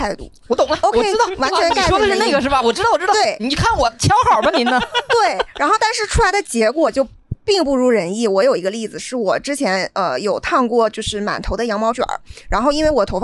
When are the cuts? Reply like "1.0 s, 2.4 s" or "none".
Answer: none